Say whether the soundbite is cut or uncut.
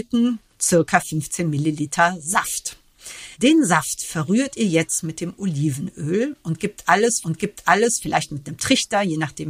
cut